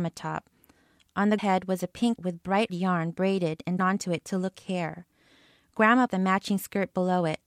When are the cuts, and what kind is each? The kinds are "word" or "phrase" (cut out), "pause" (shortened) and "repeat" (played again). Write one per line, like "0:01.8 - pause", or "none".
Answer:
0:01.4 - word
0:02.2 - word
0:02.7 - word
0:03.8 - word
0:04.5 - word
0:06.1 - word

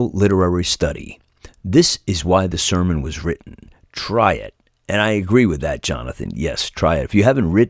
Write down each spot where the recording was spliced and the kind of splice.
none

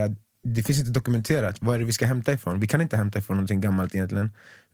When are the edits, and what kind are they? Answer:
none

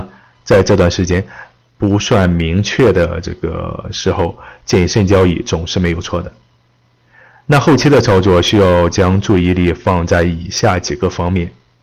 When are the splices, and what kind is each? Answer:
none

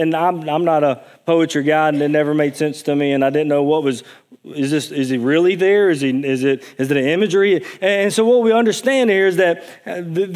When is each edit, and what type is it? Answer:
none

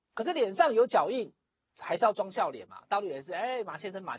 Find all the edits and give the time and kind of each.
none

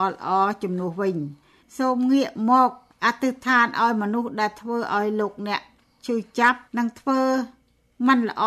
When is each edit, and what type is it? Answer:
0:06.7 - pause

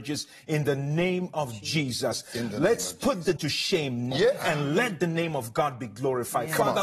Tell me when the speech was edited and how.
0:03.4 - word
0:04.1 - word

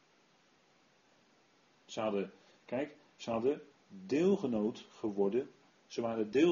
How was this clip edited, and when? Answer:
none

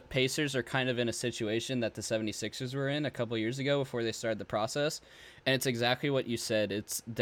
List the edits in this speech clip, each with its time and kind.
none

